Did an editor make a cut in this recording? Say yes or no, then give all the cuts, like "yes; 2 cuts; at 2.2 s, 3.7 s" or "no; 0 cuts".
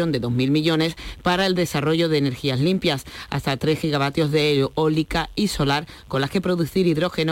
no; 0 cuts